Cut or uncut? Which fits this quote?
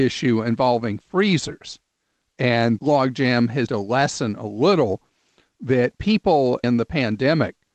cut